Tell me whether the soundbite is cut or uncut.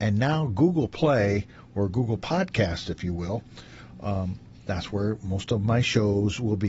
uncut